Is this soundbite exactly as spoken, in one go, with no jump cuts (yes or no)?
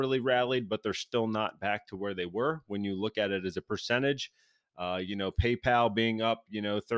yes